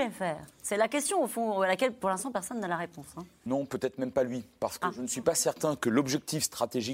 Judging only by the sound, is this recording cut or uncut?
uncut